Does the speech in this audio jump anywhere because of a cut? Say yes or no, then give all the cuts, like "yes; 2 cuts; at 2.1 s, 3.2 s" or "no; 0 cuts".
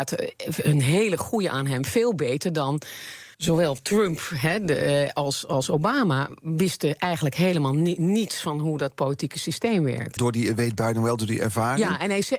yes; 2 cuts; at 3.3 s, 10.2 s